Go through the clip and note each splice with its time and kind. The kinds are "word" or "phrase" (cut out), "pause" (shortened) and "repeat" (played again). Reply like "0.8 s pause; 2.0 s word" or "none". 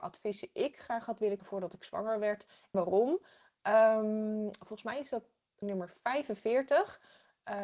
1.4 s word; 2.7 s word; 5.6 s word